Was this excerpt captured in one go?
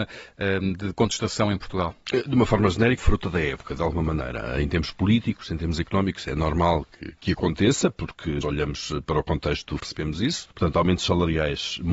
no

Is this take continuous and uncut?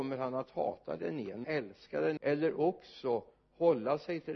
no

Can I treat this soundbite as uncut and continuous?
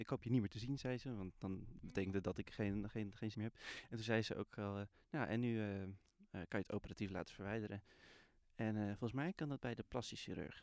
no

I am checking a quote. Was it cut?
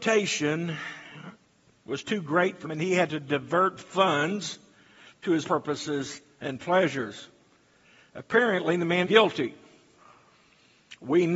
yes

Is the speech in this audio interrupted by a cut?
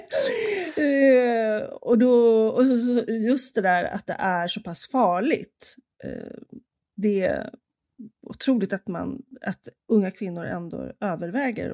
no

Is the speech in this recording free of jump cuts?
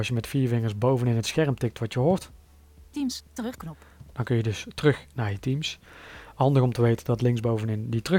yes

